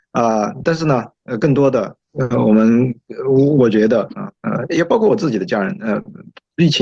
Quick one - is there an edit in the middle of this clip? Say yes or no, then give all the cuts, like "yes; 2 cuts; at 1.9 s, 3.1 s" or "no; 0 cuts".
yes; 2 cuts; at 2.0 s, 4.4 s